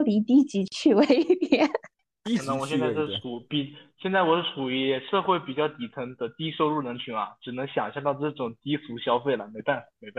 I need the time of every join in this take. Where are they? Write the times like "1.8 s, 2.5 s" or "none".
2.1 s